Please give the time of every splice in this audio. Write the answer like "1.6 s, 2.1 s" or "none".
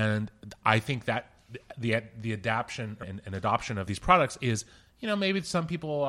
3.0 s, 3.9 s